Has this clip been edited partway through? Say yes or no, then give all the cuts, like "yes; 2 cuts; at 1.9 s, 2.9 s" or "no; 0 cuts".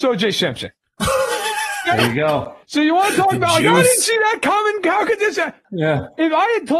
yes; 1 cut; at 2.6 s